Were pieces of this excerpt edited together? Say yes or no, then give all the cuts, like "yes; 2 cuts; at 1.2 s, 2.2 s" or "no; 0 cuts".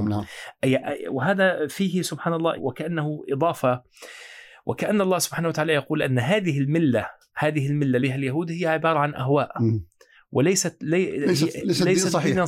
yes; 2 cuts; at 2.6 s, 8.0 s